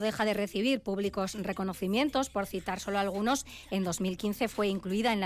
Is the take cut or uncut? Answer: uncut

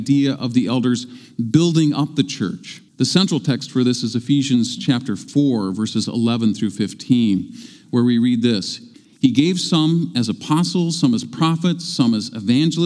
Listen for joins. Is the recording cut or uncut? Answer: cut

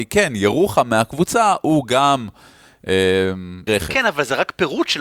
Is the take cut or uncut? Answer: cut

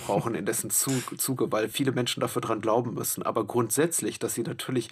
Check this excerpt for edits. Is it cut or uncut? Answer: uncut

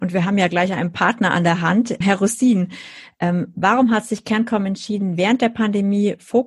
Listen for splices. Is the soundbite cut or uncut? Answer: cut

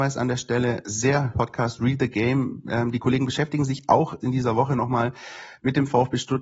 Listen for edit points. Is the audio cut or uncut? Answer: cut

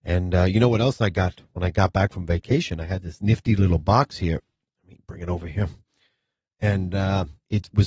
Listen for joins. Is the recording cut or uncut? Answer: uncut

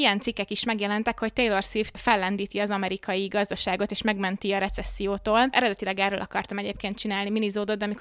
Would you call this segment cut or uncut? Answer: uncut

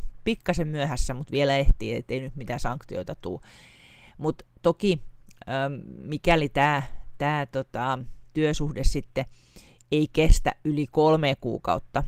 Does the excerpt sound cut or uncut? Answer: uncut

